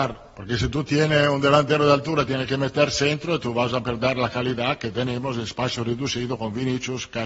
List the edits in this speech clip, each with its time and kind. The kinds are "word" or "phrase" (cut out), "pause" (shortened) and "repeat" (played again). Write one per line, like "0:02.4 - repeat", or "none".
none